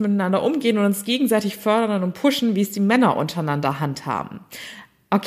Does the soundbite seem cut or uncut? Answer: uncut